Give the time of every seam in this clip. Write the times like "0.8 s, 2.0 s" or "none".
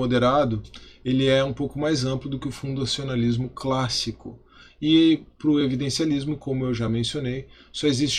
none